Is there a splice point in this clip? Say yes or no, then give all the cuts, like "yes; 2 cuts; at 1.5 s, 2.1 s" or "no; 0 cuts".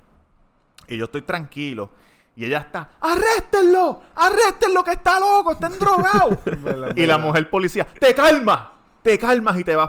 no; 0 cuts